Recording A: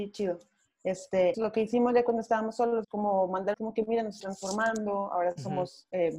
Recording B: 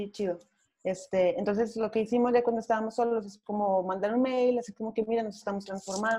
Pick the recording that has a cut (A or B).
A